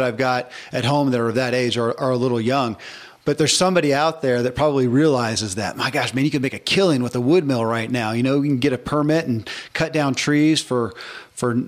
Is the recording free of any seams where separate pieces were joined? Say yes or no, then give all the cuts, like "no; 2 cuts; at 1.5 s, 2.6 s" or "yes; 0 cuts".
yes; 0 cuts